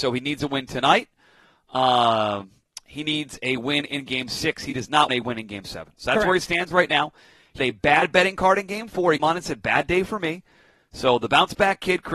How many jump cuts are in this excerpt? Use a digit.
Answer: 3